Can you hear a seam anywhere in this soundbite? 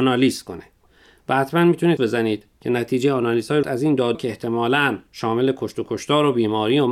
yes; 4 cuts; at 2.0 s, 3.6 s, 4.1 s, 5.1 s

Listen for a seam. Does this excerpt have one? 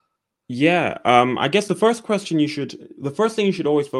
no; 0 cuts

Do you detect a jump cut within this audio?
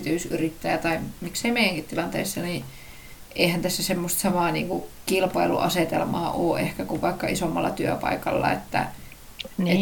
no; 0 cuts

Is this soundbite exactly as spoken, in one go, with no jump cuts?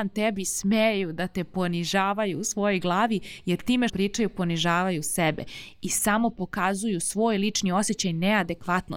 no; 1 cut; at 3.9 s

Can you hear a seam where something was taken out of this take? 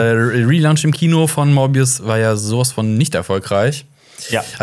no; 0 cuts

